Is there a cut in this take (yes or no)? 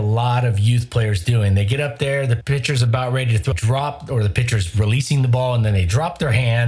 yes